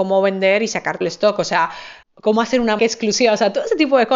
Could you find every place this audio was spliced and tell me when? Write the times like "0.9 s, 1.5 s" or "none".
1.0 s, 2.0 s, 2.8 s